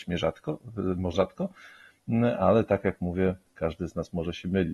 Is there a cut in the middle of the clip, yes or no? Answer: yes